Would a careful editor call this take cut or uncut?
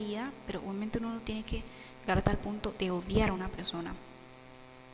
uncut